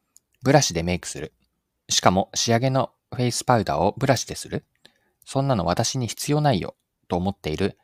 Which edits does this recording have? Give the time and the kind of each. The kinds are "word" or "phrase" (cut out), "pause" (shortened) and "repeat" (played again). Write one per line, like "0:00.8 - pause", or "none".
0:01.7 - pause
0:03.0 - pause